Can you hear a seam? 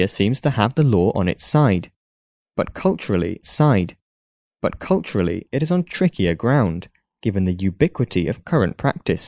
yes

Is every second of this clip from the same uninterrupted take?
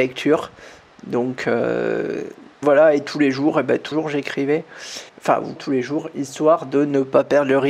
no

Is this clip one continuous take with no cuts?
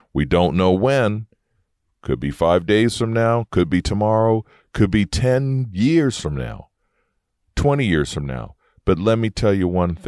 yes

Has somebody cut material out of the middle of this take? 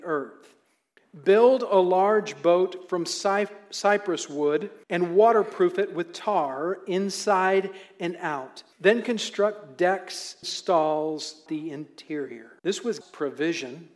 yes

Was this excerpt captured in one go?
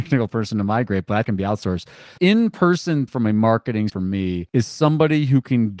no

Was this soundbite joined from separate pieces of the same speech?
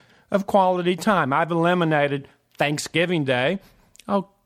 no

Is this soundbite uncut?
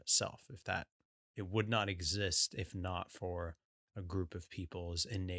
yes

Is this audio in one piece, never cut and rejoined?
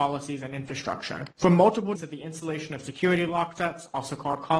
no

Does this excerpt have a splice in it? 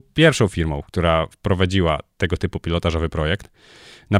no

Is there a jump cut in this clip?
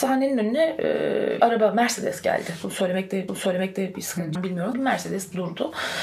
yes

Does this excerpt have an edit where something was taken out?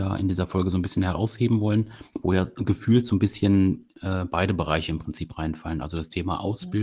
yes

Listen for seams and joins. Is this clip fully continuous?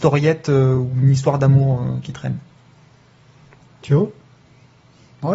yes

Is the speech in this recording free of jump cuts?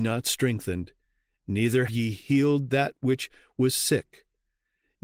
no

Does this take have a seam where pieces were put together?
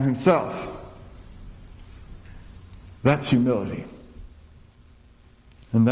yes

